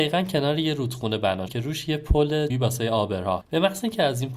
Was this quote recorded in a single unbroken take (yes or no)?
no